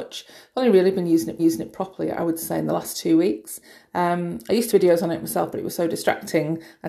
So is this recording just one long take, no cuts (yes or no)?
no